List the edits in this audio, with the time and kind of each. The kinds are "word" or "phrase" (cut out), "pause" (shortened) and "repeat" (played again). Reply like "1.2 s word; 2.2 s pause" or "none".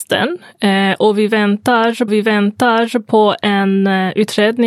2.1 s repeat